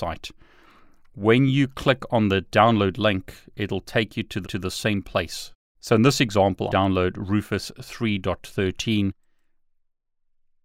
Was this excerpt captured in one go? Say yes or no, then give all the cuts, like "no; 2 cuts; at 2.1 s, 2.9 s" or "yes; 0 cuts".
no; 2 cuts; at 4.4 s, 6.7 s